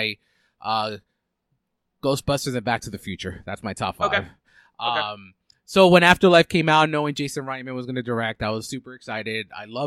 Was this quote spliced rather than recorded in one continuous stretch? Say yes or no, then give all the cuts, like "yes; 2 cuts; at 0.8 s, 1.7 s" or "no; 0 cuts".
no; 0 cuts